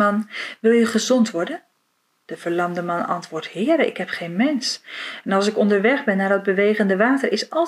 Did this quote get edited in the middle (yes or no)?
no